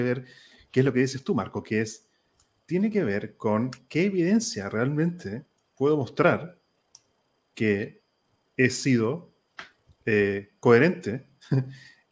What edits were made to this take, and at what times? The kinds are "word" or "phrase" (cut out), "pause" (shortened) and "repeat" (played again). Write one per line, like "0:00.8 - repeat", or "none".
none